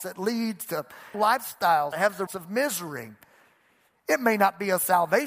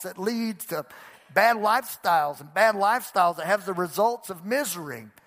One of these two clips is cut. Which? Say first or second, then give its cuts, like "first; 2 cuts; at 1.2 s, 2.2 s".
first; 3 cuts; at 1.1 s, 1.9 s, 2.3 s